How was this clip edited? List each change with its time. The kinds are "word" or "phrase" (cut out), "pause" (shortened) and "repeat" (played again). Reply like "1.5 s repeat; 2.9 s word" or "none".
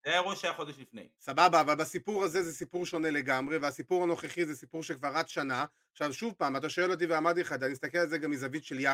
1.1 s pause